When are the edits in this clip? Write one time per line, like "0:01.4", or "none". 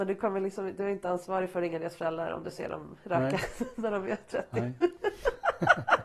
none